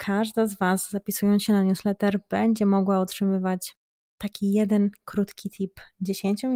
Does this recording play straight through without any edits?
yes; 0 cuts

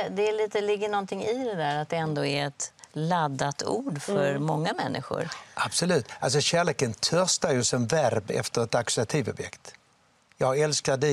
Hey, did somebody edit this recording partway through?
no; 0 cuts

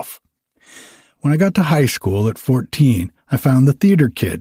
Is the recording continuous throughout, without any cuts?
no; 1 cut; at 3.2 s

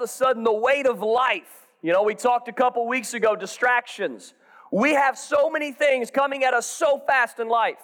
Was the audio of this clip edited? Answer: no; 0 cuts

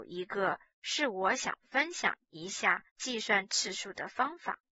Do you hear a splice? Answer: yes; 1 cut; at 2.9 s

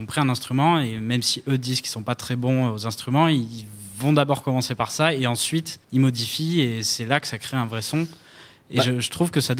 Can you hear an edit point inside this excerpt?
yes; 1 cut; at 5.8 s

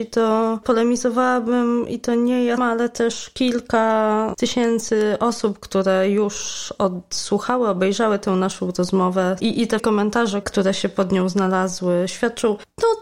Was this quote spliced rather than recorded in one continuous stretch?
yes; 2 cuts; at 2.6 s, 9.8 s

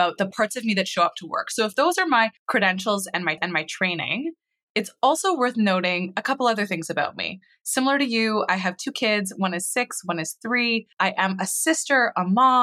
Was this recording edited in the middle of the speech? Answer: yes; 3 cuts; at 2.4 s, 3.4 s, 10.9 s

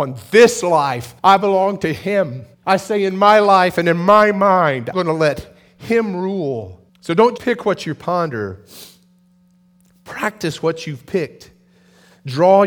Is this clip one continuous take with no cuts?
no; 5 cuts; at 1.2 s, 2.5 s, 4.9 s, 6.9 s, 7.4 s

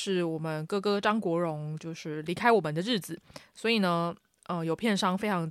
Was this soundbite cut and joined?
no; 0 cuts

